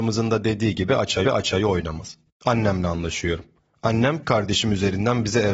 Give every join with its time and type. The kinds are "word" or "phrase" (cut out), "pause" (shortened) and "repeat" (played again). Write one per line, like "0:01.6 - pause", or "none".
0:01.2 - repeat
0:04.2 - word